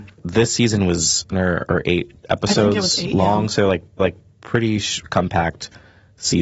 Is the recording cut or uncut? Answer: cut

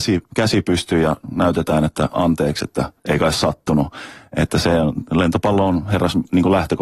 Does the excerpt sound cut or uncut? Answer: cut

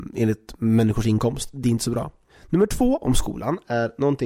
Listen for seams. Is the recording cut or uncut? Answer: uncut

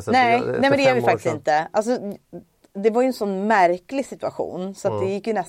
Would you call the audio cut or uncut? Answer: uncut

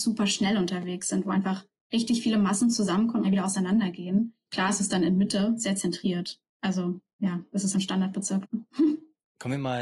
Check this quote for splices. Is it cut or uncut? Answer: cut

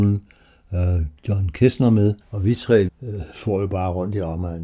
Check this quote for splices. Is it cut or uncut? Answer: cut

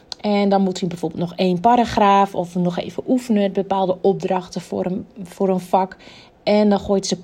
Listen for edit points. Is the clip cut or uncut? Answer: cut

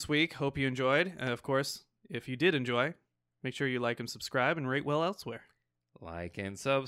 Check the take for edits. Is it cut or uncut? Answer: uncut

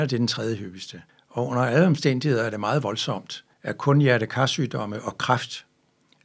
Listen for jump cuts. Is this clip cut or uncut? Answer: cut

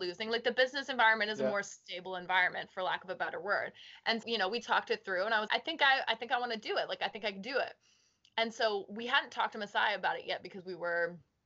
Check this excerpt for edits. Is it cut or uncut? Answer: cut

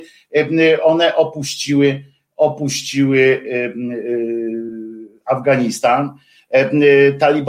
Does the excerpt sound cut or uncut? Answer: uncut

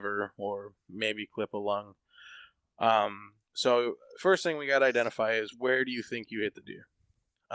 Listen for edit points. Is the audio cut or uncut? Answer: cut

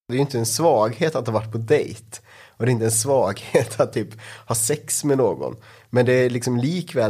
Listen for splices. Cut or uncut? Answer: uncut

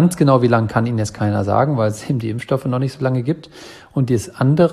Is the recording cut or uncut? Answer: uncut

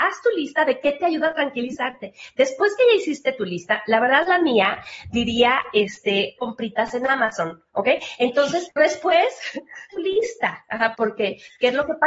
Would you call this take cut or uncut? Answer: cut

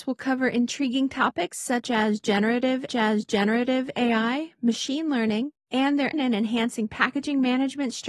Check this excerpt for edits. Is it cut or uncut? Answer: cut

